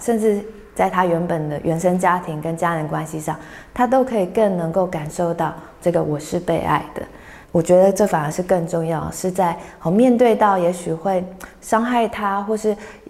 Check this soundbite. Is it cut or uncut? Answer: cut